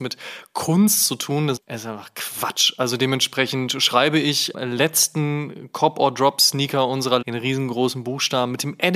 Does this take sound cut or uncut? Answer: cut